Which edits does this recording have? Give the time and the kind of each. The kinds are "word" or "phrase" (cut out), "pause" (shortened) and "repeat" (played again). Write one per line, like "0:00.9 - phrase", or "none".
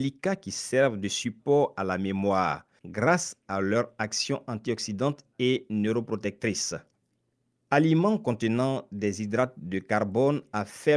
none